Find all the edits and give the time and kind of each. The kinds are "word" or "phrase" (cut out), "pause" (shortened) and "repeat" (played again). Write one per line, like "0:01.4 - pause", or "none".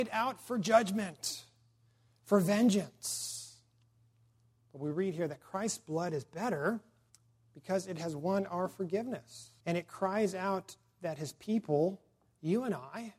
0:07.1 - pause
0:09.6 - pause